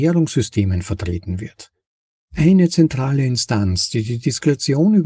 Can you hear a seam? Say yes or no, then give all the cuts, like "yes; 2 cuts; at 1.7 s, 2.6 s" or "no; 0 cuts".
no; 0 cuts